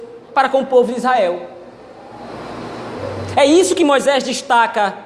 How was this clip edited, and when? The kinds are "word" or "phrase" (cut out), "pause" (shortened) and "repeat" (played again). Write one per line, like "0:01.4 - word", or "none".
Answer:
none